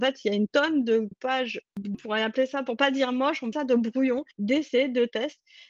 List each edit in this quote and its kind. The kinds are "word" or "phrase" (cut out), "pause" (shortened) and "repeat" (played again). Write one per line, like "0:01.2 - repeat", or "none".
0:01.1 - word
0:01.9 - word
0:03.5 - phrase
0:04.3 - pause